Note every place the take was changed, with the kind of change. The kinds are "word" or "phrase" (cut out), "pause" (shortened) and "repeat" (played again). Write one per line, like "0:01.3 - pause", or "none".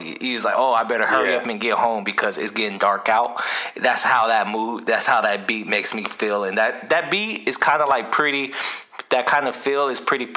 none